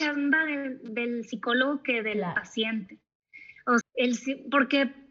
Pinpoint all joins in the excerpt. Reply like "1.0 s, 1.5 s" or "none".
3.8 s